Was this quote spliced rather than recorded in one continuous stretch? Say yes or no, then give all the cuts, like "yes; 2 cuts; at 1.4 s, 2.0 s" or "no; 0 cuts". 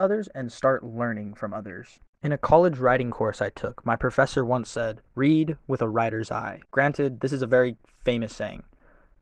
yes; 3 cuts; at 2.1 s, 5.1 s, 6.6 s